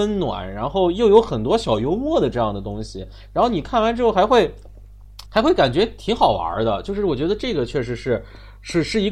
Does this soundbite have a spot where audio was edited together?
yes; 1 cut; at 5.3 s

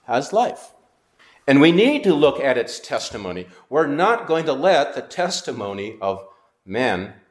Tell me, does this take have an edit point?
yes; 1 cut; at 1.2 s

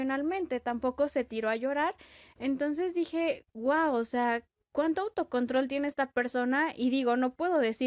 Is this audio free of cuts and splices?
yes; 0 cuts

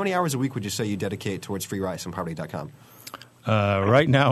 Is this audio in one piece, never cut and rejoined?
yes; 0 cuts

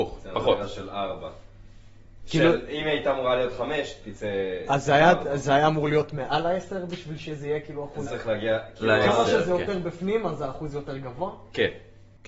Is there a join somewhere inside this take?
yes; 1 cut; at 8.1 s

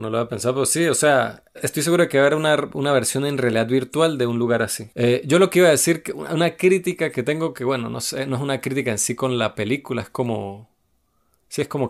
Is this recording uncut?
no; 1 cut; at 4.9 s

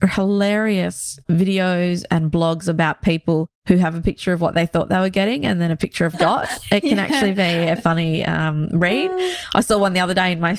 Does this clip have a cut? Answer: yes; 2 cuts; at 6.1 s, 7.8 s

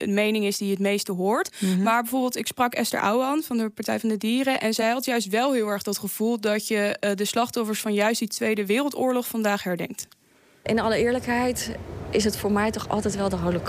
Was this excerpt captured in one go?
yes; 0 cuts

